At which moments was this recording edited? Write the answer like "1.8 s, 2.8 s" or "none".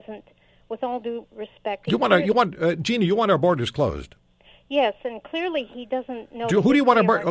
none